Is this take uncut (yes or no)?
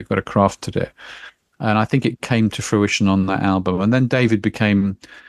yes